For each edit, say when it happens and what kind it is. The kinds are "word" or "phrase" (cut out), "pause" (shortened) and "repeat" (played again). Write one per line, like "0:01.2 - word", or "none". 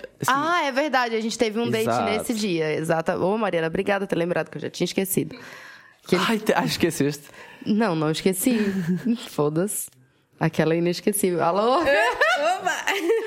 none